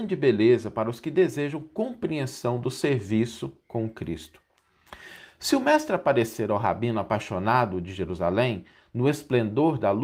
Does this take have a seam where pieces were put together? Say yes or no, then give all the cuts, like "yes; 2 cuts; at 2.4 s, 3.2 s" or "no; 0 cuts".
no; 0 cuts